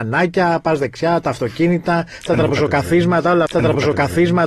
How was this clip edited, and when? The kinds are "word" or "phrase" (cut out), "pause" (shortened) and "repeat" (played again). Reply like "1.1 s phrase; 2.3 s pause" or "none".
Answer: 3.5 s repeat